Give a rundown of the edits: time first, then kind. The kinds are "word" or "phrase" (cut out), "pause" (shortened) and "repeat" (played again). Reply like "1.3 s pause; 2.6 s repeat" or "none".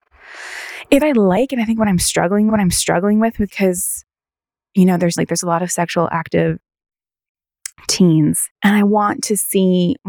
1.0 s word; 2.5 s repeat; 3.5 s word; 5.2 s word; 8.5 s pause